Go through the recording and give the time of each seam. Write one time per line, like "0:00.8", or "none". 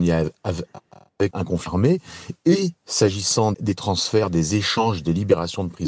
0:01.3
0:03.5